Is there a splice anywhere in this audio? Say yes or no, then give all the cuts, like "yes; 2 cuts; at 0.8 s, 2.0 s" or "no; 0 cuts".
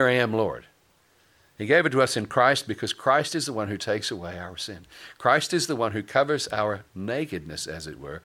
no; 0 cuts